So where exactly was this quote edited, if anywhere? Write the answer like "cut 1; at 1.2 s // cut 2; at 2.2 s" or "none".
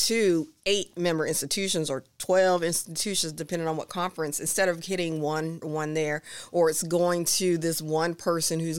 cut 1; at 5.6 s